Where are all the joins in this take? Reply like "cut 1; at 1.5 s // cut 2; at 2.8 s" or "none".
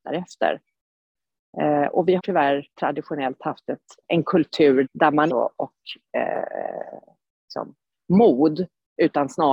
cut 1; at 2.2 s // cut 2; at 2.7 s // cut 3; at 4.0 s // cut 4; at 4.8 s // cut 5; at 5.3 s